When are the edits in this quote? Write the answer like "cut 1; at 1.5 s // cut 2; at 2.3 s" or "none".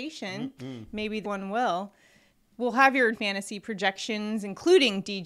cut 1; at 1.2 s // cut 2; at 3.1 s